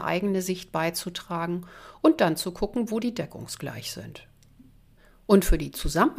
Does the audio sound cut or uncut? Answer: uncut